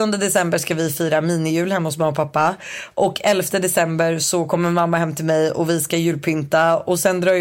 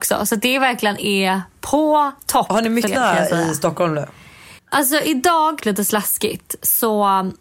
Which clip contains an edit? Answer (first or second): second